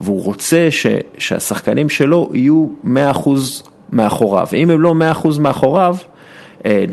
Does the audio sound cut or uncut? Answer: uncut